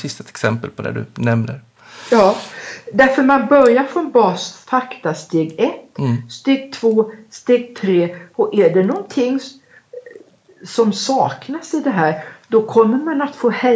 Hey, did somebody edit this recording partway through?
no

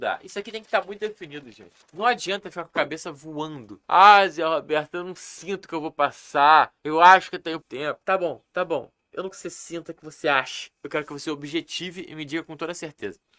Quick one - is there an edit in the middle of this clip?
yes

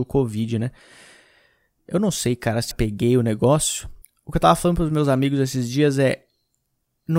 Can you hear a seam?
yes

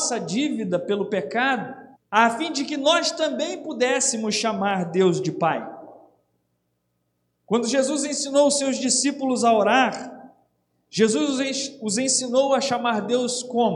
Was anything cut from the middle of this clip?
yes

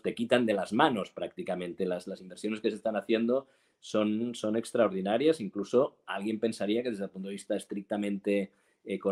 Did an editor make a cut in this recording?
no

